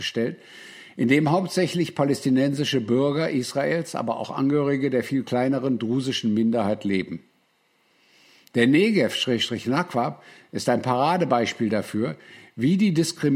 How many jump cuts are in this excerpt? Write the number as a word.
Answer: zero